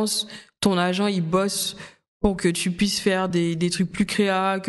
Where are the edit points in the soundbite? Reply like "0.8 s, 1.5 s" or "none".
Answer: none